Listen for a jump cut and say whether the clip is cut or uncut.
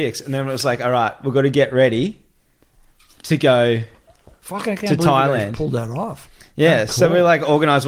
uncut